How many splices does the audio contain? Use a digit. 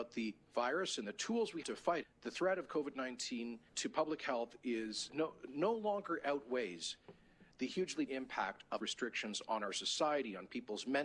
6